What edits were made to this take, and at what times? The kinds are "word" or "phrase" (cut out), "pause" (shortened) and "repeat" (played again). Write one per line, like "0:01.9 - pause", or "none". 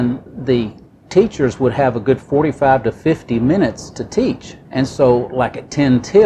0:04.6 - pause